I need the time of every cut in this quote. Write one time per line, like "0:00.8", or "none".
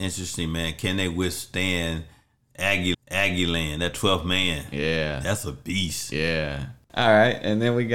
0:02.9